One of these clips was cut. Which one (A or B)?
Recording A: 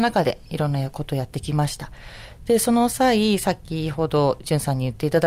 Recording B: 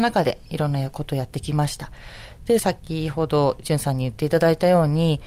B